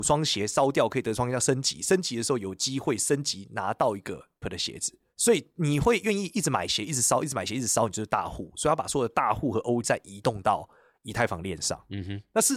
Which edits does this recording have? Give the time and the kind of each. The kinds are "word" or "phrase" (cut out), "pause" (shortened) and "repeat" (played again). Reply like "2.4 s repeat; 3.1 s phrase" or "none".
4.4 s word; 9.8 s word